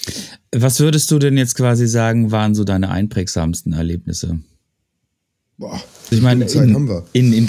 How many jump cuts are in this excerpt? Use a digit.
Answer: 1